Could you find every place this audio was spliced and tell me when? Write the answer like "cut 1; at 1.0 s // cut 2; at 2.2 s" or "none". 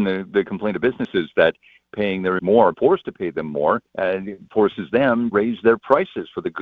cut 1; at 2.4 s // cut 2; at 2.7 s // cut 3; at 3.9 s // cut 4; at 5.3 s

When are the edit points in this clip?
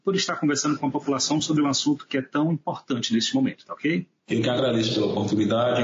none

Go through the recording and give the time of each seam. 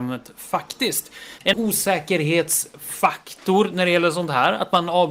cut 1; at 1.5 s

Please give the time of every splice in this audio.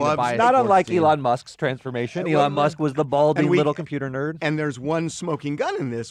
none

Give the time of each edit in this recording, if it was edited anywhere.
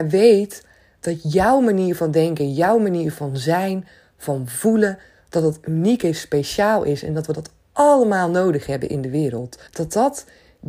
cut 1; at 9.7 s

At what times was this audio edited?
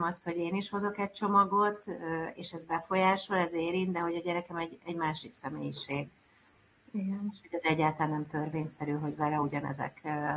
none

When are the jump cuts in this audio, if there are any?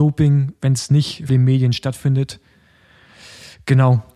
cut 1; at 1.3 s

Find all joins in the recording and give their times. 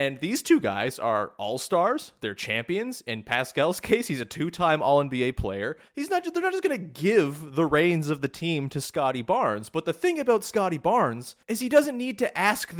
cut 1; at 5.9 s // cut 2; at 11.4 s

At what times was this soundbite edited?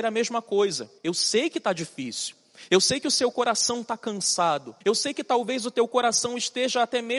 cut 1; at 1.0 s // cut 2; at 4.8 s

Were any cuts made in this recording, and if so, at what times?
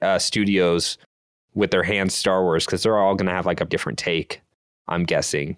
cut 1; at 2.1 s // cut 2; at 3.7 s

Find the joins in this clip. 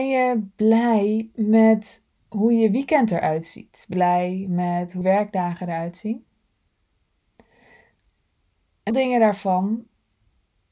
cut 1; at 3.9 s // cut 2; at 5.0 s // cut 3; at 8.9 s

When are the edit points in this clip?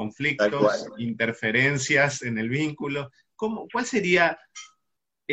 none

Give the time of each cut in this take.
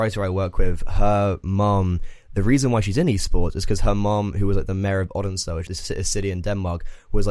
cut 1; at 5.7 s

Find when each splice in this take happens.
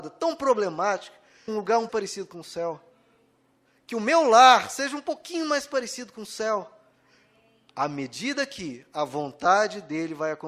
cut 1; at 1.5 s // cut 2; at 1.9 s

